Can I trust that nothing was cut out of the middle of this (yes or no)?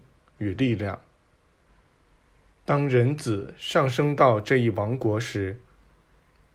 yes